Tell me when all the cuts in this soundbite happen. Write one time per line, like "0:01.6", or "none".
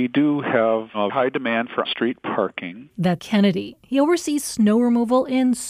0:01.1
0:01.8
0:03.2

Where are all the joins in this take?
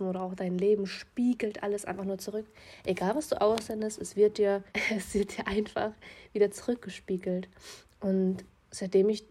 0:04.7

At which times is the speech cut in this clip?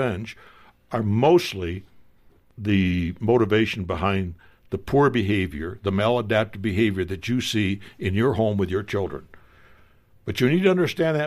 none

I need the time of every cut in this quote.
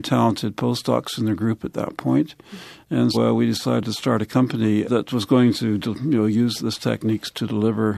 0:03.1
0:06.6

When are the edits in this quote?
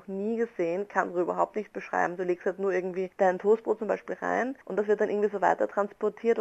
none

